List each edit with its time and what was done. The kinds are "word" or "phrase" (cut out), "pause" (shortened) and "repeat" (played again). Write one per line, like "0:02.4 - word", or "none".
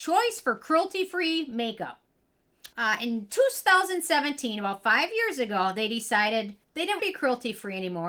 0:02.7 - pause
0:06.6 - pause
0:07.0 - word